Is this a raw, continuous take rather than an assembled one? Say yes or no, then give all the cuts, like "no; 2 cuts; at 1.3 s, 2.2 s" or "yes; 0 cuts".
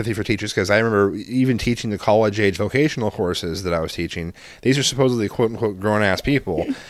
yes; 0 cuts